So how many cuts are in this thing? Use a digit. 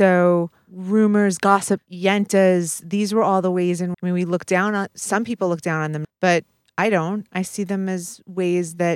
3